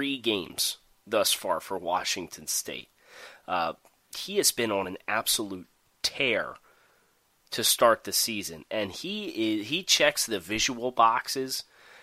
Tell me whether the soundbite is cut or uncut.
uncut